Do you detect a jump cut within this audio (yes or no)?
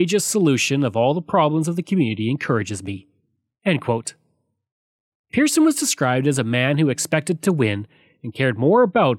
no